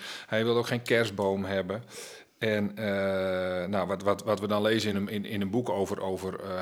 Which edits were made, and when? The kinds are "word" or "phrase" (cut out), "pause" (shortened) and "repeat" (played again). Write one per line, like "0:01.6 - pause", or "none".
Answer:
none